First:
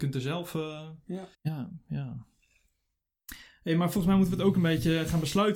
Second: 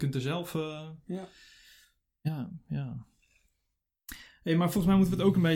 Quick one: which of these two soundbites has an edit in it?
first; 1 cut; at 1.3 s

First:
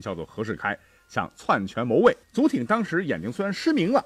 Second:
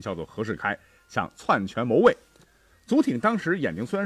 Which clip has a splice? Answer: first; 1 cut; at 2.2 s

